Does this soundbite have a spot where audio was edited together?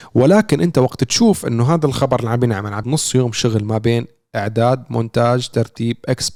yes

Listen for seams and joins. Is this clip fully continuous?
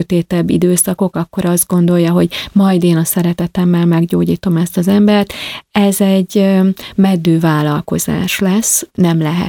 yes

